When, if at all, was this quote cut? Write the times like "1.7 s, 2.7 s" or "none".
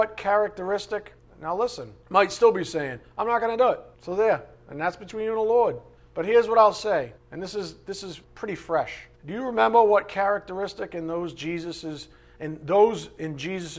1.2 s, 2.0 s, 3.9 s, 6.0 s, 7.2 s, 8.2 s, 9.1 s